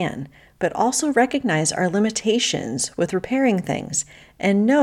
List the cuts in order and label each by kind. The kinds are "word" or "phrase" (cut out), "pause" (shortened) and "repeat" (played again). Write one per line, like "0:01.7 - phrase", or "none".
none